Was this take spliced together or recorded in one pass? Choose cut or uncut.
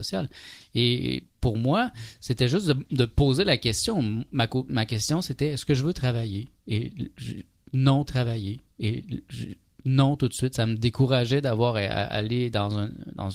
cut